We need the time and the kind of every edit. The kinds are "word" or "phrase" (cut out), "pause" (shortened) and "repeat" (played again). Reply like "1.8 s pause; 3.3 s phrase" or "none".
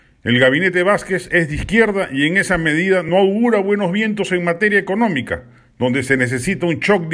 none